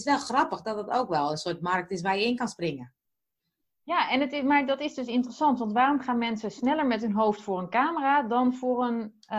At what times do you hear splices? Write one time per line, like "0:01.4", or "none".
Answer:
none